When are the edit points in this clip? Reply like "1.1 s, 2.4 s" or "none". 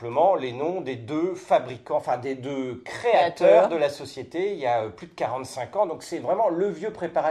none

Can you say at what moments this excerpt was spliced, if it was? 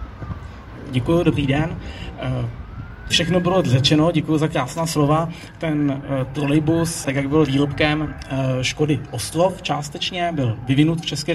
3.1 s, 7.0 s, 7.5 s

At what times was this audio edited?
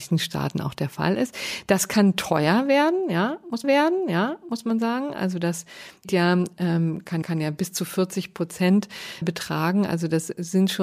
3.6 s, 6.0 s, 7.2 s, 9.2 s

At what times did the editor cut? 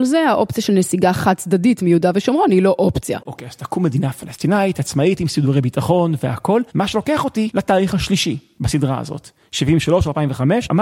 6.7 s

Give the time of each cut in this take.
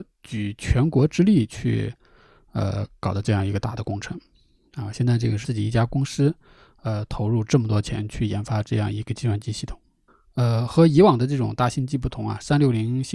5.4 s

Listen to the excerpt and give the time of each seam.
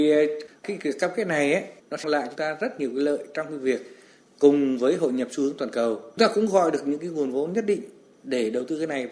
2.0 s, 2.4 s, 6.2 s

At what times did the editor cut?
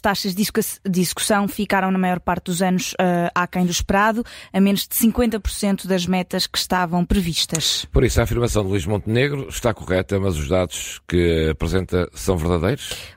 none

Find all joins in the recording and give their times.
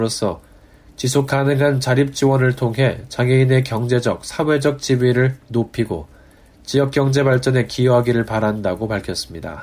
none

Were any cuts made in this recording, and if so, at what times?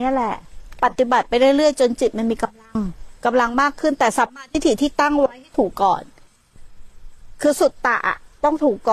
3.2 s

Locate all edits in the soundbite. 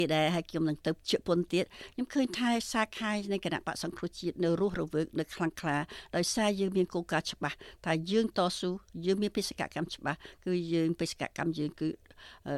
1.0 s

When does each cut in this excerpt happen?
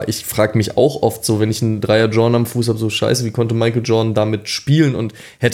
none

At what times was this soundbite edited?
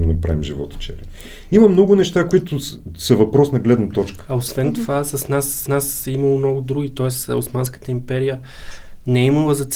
5.7 s

